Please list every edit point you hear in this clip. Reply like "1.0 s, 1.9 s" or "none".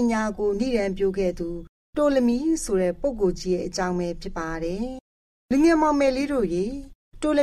none